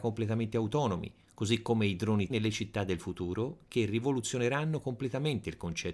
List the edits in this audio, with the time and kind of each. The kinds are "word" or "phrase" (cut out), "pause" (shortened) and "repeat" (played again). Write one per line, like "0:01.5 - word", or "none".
0:02.3 - word